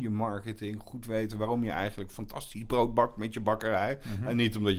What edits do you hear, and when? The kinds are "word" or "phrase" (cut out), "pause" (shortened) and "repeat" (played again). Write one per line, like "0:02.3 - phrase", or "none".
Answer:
none